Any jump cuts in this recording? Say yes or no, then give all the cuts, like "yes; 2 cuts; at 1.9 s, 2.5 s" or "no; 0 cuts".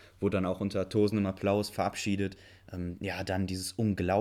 no; 0 cuts